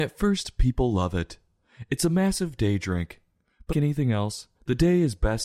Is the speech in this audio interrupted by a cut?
yes; 2 cuts; at 3.7 s, 4.6 s

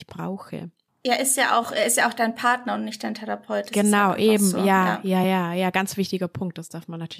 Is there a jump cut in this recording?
no; 0 cuts

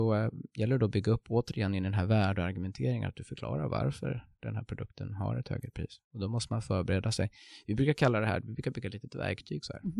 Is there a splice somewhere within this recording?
no; 0 cuts

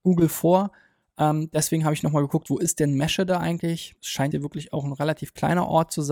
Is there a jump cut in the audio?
yes; 2 cuts; at 4.0 s, 4.3 s

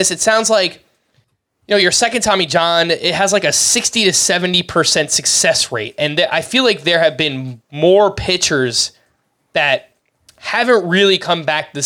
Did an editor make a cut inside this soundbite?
no; 0 cuts

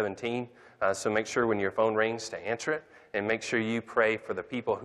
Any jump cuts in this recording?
no; 0 cuts

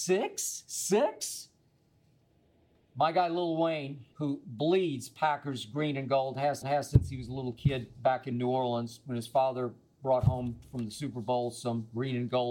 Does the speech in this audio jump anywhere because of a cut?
yes; 2 cuts; at 4.1 s, 6.6 s

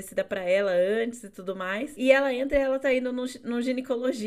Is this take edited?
no; 0 cuts

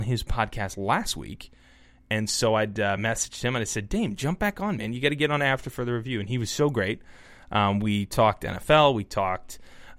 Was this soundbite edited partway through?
no; 0 cuts

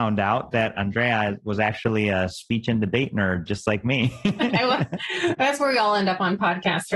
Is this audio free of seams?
yes; 0 cuts

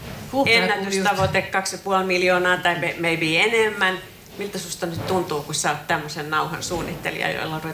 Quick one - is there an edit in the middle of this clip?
no; 0 cuts

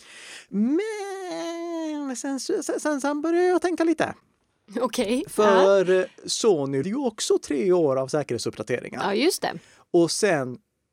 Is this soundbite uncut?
no; 1 cut; at 6.8 s

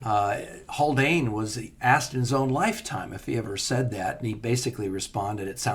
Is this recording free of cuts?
yes; 0 cuts

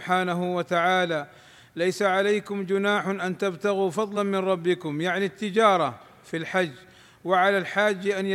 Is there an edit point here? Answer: no; 0 cuts

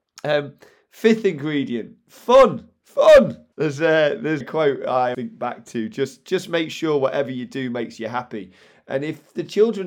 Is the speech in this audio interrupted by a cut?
yes; 3 cuts; at 3.5 s, 4.4 s, 5.1 s

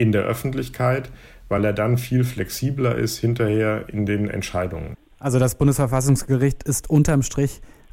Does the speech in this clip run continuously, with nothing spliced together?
yes; 0 cuts

